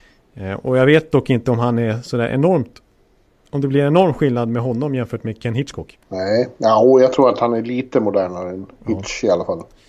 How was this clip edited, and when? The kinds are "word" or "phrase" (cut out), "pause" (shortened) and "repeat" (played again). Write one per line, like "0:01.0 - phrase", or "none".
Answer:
none